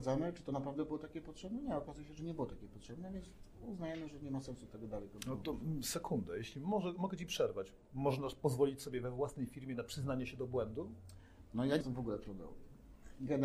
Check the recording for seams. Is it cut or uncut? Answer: cut